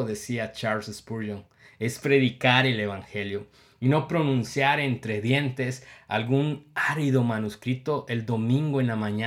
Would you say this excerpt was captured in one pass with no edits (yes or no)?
yes